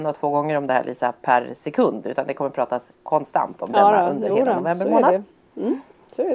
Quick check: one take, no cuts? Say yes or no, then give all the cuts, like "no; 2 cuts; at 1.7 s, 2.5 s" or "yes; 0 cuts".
yes; 0 cuts